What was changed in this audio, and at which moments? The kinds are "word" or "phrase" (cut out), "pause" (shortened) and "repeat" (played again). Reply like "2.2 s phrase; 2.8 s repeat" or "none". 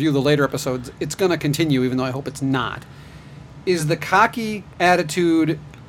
none